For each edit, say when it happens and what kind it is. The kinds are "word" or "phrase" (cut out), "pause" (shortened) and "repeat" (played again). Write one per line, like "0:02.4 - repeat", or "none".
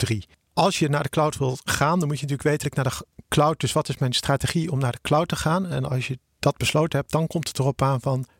0:02.6 - phrase